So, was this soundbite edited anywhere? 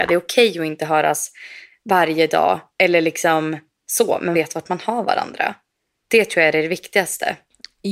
yes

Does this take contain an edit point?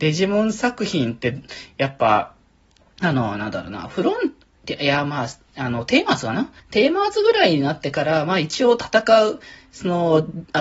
yes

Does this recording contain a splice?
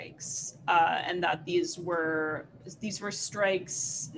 no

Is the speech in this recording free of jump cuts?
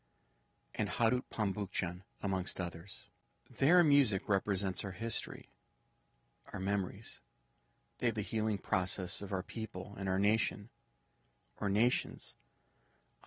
no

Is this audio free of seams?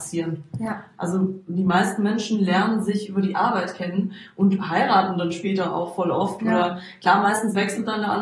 yes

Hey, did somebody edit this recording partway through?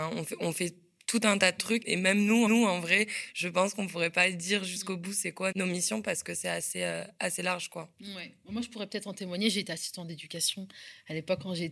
yes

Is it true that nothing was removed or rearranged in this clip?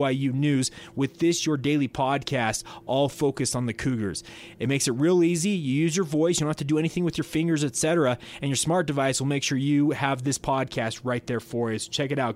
yes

